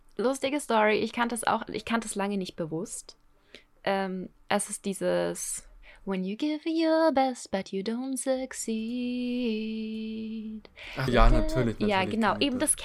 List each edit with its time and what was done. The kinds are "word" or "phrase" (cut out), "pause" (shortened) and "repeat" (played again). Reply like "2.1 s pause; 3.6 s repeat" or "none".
1.7 s word; 11.1 s word

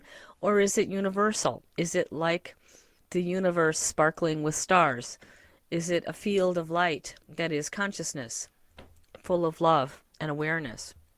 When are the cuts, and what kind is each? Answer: 7.2 s pause; 10.1 s pause

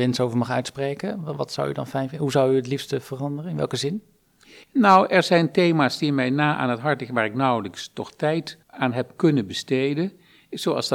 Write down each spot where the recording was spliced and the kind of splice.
4.6 s pause; 8.6 s pause

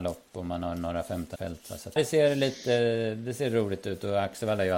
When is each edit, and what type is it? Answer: 1.4 s word; 2.0 s word

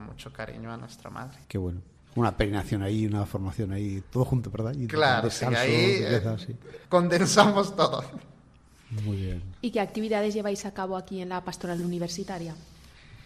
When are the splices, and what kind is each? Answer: 1.4 s pause; 2.0 s pause; 4.0 s word; 6.8 s pause

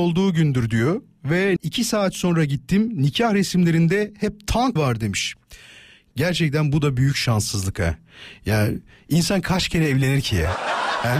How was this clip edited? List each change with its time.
1.6 s word; 4.8 s word

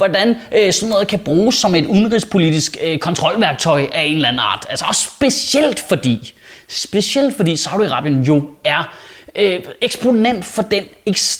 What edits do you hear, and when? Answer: none

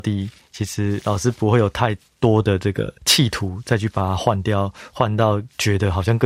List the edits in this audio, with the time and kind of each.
3.0 s pause

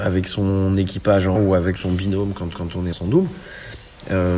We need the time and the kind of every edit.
1.4 s word; 1.8 s word; 2.5 s repeat; 2.9 s word

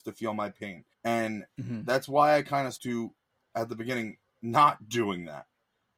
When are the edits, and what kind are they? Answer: 0.9 s pause; 2.8 s word

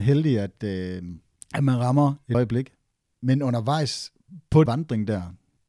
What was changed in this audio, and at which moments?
2.3 s word; 4.7 s word

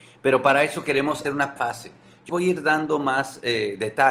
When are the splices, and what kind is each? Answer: 1.2 s word; 1.6 s word; 2.3 s word

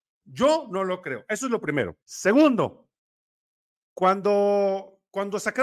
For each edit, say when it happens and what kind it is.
2.0 s pause

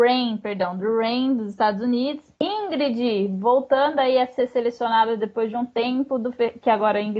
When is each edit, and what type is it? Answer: 2.4 s pause

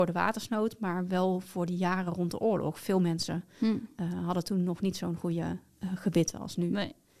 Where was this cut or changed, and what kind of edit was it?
none

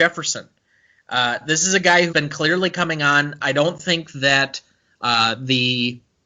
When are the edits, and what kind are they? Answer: 2.1 s word

